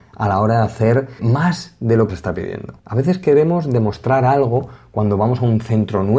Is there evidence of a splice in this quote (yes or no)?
yes